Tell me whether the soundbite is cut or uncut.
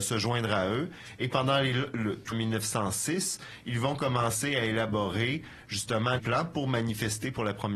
cut